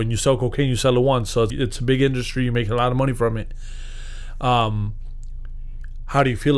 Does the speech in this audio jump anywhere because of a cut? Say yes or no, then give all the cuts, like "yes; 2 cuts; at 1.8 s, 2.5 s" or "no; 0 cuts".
yes; 1 cut; at 1.5 s